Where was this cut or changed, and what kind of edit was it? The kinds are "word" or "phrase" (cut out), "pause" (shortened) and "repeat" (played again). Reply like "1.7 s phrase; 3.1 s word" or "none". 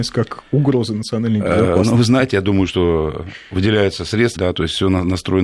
4.4 s word